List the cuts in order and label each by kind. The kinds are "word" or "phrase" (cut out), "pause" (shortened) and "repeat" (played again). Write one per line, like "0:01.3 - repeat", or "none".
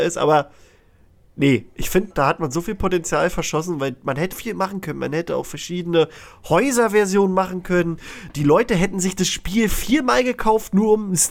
0:02.1 - word
0:04.3 - word